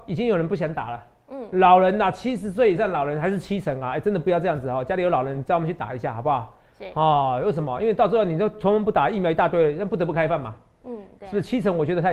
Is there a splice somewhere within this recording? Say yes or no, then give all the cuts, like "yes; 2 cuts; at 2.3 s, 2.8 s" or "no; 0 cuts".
no; 0 cuts